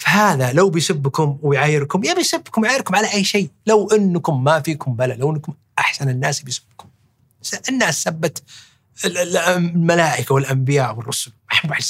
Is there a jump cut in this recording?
no; 0 cuts

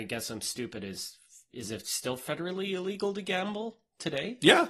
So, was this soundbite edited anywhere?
no; 0 cuts

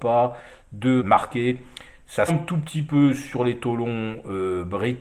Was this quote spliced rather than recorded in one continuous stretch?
yes; 2 cuts; at 1.0 s, 2.3 s

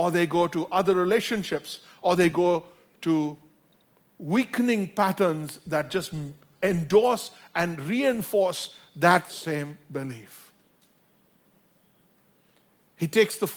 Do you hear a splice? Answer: no; 0 cuts

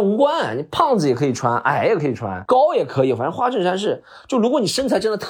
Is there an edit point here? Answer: no; 0 cuts

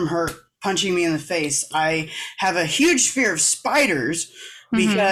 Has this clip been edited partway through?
no; 0 cuts

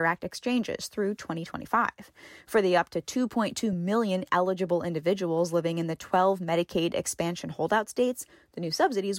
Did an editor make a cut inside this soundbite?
no; 0 cuts

